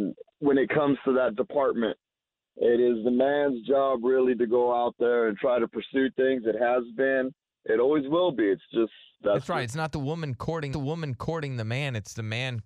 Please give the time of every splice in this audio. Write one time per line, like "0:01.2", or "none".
0:10.7